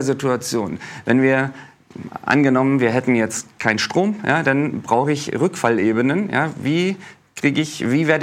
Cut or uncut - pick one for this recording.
uncut